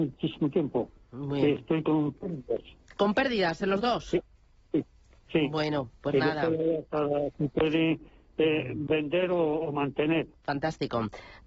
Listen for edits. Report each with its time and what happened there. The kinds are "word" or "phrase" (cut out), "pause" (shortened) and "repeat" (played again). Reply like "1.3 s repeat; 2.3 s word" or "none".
none